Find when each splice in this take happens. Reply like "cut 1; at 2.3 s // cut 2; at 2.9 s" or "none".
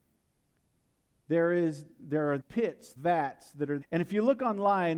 cut 1; at 2.4 s // cut 2; at 3.0 s // cut 3; at 3.8 s